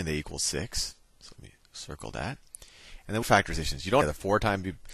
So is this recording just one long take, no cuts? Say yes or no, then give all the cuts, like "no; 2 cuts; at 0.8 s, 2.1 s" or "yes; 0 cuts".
no; 2 cuts; at 3.2 s, 4.0 s